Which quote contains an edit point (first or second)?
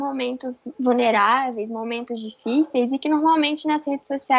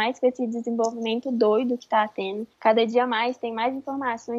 second